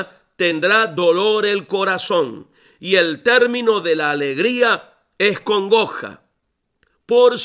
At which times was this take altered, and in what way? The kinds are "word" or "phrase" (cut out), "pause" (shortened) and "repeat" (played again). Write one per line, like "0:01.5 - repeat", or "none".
none